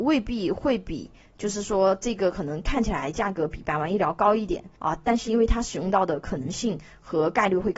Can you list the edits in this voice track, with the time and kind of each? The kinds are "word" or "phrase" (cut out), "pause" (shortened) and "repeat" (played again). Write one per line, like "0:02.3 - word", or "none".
0:04.7 - pause